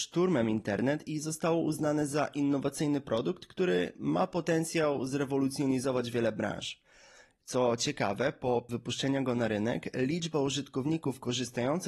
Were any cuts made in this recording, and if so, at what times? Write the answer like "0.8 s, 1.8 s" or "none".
8.7 s